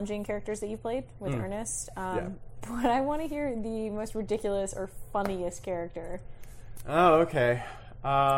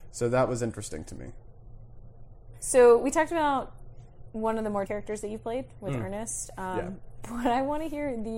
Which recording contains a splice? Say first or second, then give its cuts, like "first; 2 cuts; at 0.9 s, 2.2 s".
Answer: second; 1 cut; at 4.9 s